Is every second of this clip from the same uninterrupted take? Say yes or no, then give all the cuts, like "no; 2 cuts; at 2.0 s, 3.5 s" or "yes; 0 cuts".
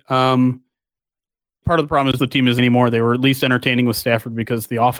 no; 3 cuts; at 1.6 s, 2.2 s, 2.6 s